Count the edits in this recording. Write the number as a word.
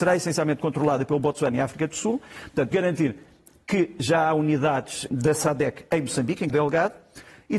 three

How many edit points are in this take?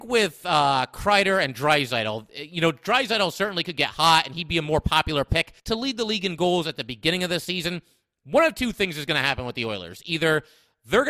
one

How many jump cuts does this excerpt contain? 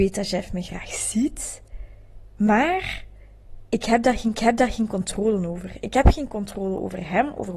one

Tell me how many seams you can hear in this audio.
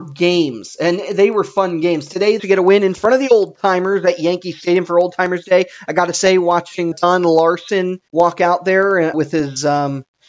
four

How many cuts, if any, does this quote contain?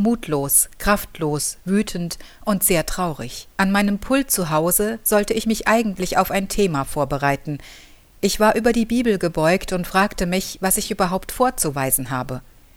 one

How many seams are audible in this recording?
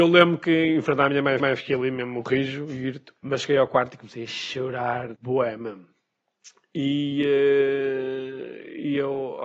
three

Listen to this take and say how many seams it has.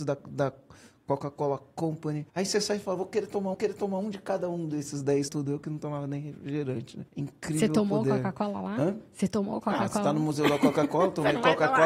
four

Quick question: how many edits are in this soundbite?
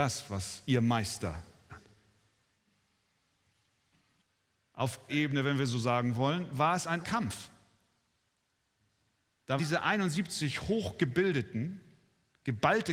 four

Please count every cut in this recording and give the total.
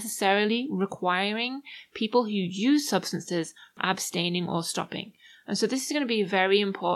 zero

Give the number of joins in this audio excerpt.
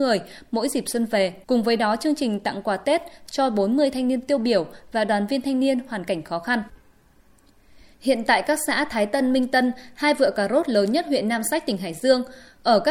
one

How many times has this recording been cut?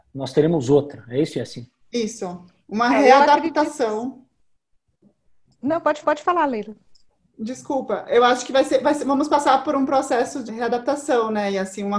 two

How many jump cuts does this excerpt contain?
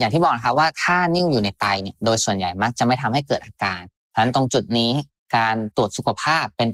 zero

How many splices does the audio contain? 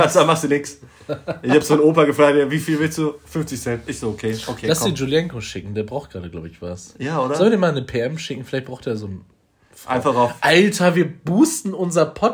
zero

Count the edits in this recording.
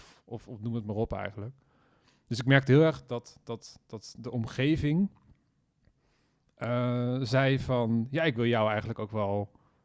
zero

